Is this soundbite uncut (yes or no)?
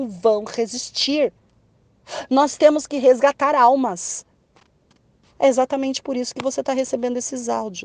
yes